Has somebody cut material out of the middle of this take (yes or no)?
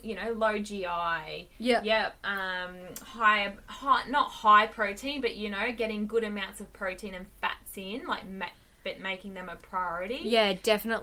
no